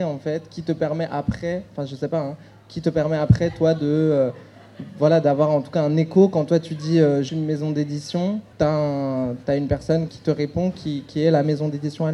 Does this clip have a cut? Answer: yes; 3 cuts; at 7.3 s, 8.5 s, 10.1 s

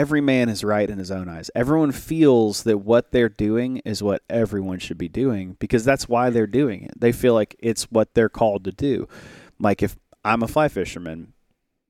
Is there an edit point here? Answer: no; 0 cuts

